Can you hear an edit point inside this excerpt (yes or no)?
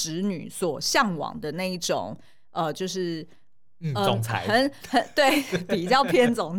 no